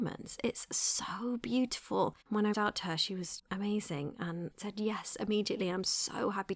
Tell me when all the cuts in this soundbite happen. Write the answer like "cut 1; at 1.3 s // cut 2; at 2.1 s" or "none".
cut 1; at 2.2 s // cut 2; at 2.5 s // cut 3; at 3.4 s // cut 4; at 4.5 s

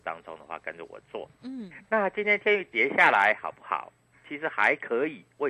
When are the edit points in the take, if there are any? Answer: none

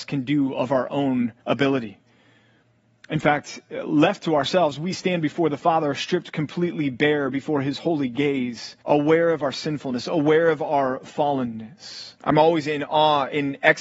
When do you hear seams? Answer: cut 1; at 1.4 s // cut 2; at 8.8 s // cut 3; at 12.2 s

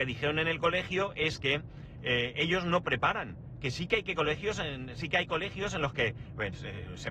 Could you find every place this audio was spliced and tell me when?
none

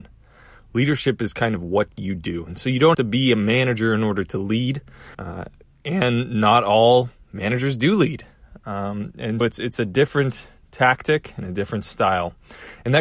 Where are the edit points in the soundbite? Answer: cut 1; at 2.9 s // cut 2; at 5.1 s // cut 3; at 9.4 s

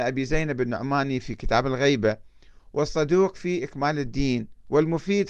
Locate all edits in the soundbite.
none

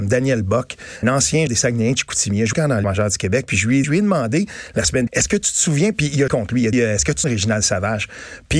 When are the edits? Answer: cut 1; at 1.0 s // cut 2; at 1.5 s // cut 3; at 2.5 s // cut 4; at 2.8 s // cut 5; at 3.8 s // cut 6; at 5.1 s // cut 7; at 6.3 s // cut 8; at 6.7 s // cut 9; at 7.2 s

